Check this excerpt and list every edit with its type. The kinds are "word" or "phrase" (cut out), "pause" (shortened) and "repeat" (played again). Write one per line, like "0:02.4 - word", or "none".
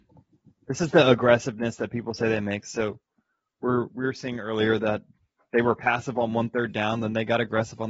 none